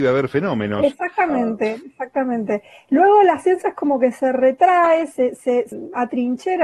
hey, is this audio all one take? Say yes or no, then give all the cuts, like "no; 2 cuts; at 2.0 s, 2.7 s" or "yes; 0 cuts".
yes; 0 cuts